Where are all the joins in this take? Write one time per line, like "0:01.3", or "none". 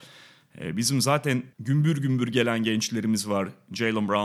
0:01.5